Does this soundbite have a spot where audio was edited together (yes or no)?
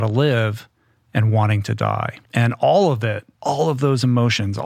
yes